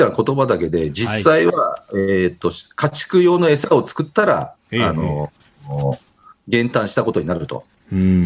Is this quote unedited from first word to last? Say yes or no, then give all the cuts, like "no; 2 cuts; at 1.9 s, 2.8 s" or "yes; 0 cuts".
yes; 0 cuts